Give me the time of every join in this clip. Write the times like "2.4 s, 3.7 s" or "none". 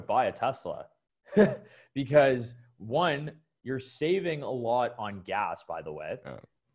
none